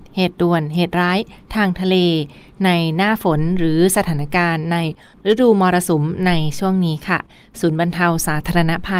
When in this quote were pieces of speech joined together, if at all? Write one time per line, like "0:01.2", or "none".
none

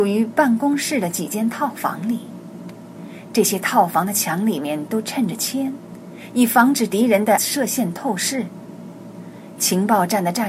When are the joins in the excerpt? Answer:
0:07.4

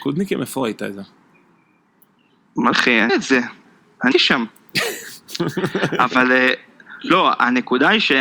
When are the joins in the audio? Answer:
0:02.7
0:03.1
0:04.1

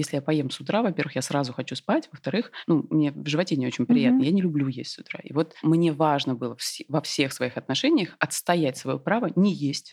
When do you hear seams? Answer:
none

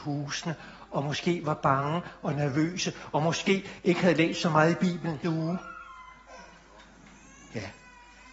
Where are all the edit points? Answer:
0:05.2

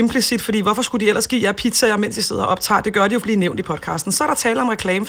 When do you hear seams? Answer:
0:03.2

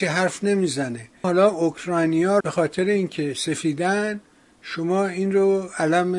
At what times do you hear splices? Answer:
0:01.2
0:02.4

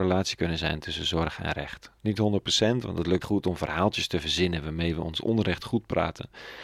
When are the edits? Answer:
0:02.0
0:03.2

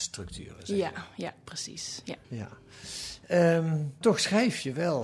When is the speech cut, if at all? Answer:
0:02.2
0:04.0

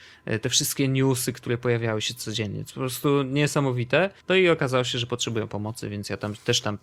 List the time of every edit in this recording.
0:04.2

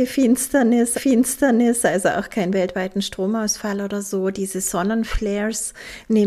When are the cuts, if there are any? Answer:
0:00.9

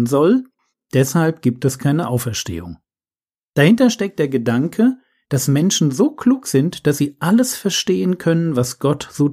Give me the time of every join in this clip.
none

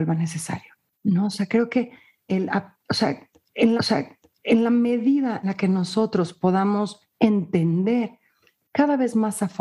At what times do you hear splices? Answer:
0:00.9
0:02.3
0:03.8
0:05.4

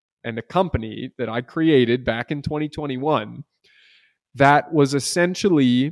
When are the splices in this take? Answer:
none

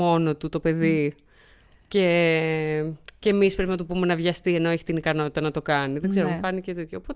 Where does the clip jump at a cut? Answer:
none

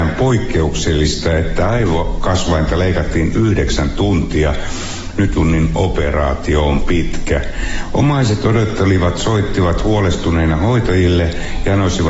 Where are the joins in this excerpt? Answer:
0:05.4

